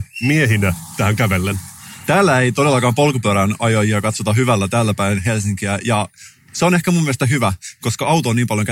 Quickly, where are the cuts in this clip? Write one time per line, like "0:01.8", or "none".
none